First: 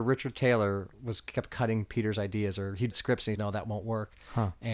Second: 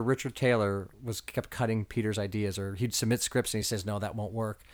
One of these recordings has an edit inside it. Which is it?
first; 2 cuts; at 2.9 s, 3.4 s

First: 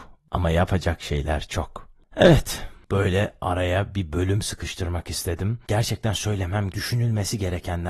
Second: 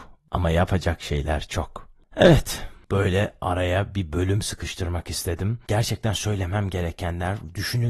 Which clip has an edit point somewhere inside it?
first; 1 cut; at 6.7 s

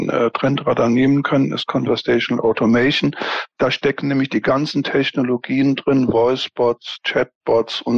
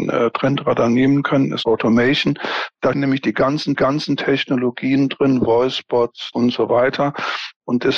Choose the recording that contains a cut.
second; 4 cuts; at 1.6 s, 2.9 s, 3.7 s, 6.3 s

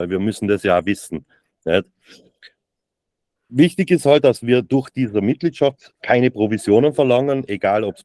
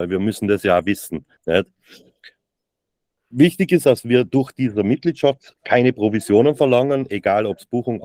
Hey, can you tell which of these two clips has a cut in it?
second; 2 cuts; at 1.4 s, 3.8 s

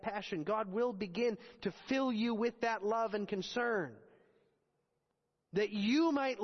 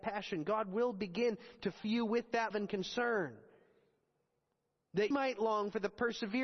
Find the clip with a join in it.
second; 3 cuts; at 1.8 s, 2.5 s, 5.1 s

